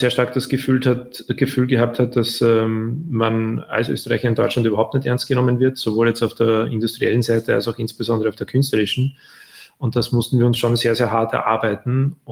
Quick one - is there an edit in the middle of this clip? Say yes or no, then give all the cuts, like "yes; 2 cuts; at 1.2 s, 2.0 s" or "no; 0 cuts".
no; 0 cuts